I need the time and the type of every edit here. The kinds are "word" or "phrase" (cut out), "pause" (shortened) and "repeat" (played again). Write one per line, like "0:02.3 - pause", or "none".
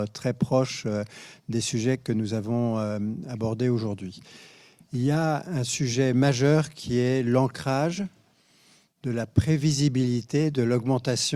none